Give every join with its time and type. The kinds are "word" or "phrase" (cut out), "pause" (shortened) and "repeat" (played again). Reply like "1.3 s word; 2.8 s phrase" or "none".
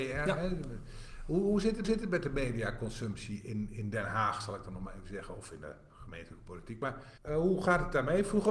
1.8 s repeat; 7.2 s pause